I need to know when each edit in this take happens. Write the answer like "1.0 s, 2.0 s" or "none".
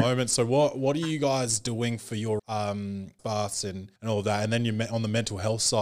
2.4 s, 3.2 s, 4.0 s